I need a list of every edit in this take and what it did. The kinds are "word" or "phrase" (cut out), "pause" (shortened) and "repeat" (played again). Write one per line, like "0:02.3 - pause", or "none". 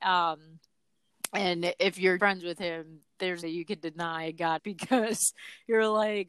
0:02.2 - word
0:03.4 - phrase
0:04.6 - word